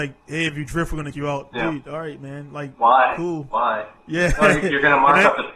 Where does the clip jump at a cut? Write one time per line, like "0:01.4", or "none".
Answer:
0:01.1
0:01.5